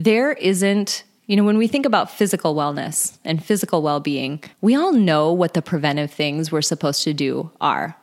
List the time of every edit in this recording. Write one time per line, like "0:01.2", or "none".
0:04.5